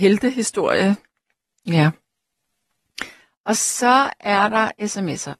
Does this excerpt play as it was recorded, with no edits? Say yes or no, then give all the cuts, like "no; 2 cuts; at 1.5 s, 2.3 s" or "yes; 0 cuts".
yes; 0 cuts